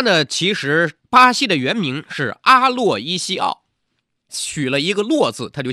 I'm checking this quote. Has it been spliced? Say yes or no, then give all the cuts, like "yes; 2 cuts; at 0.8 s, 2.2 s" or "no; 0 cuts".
yes; 2 cuts; at 1.0 s, 4.3 s